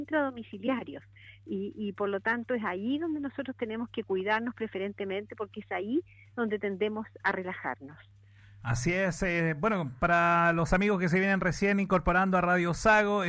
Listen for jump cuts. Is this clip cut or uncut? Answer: uncut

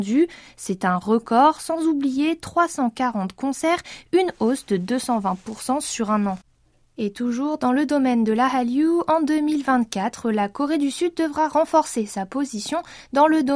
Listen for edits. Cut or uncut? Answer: uncut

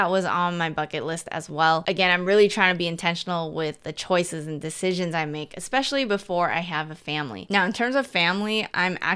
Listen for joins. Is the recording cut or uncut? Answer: uncut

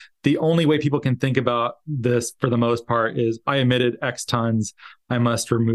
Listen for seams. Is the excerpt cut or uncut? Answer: uncut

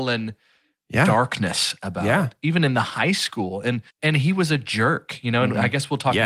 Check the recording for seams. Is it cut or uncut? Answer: cut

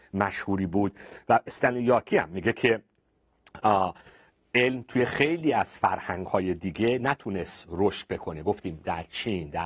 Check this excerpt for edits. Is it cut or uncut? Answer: uncut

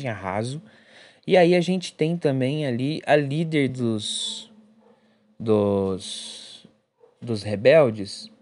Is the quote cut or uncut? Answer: uncut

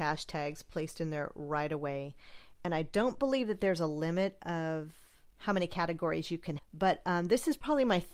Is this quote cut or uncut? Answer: cut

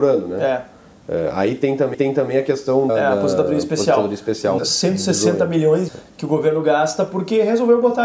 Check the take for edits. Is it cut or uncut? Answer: cut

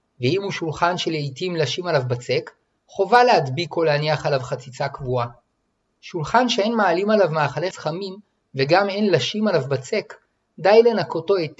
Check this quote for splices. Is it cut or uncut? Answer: cut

